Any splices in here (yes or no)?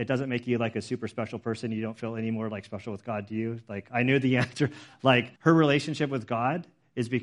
yes